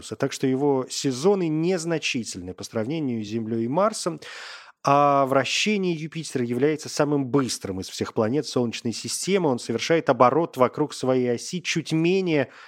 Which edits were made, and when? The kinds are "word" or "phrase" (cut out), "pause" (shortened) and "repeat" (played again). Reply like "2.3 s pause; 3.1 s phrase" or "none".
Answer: none